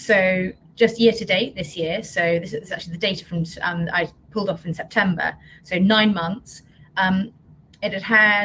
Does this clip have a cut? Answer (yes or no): no